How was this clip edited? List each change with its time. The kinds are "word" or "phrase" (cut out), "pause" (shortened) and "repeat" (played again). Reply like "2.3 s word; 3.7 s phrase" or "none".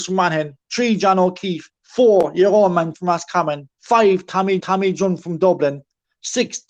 1.8 s pause; 2.9 s phrase; 3.7 s pause; 4.6 s repeat